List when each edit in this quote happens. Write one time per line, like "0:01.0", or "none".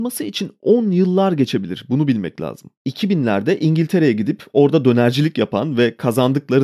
0:02.8